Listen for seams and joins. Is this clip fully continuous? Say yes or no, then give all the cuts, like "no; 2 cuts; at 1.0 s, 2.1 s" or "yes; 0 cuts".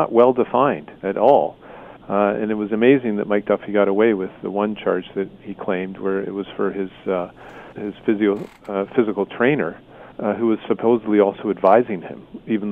no; 4 cuts; at 1.0 s, 2.0 s, 7.7 s, 10.1 s